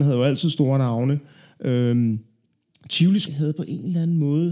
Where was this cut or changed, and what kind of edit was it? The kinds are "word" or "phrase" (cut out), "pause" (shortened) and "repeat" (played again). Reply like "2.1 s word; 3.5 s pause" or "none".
3.3 s word